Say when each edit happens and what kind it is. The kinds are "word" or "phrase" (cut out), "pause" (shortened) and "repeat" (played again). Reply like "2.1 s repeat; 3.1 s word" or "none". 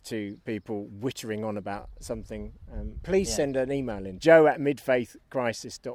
2.0 s word; 3.0 s word; 4.2 s word